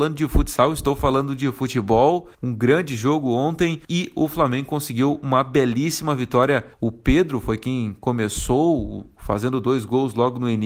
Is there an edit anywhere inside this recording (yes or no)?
yes